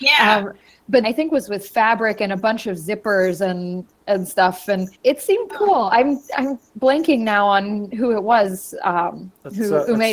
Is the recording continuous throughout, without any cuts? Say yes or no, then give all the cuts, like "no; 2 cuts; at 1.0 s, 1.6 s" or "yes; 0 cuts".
no; 3 cuts; at 1.0 s, 5.0 s, 5.5 s